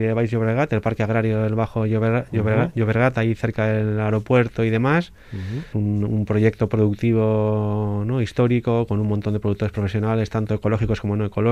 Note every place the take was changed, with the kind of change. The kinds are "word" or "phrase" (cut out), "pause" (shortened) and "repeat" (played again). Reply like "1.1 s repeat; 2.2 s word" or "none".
5.7 s word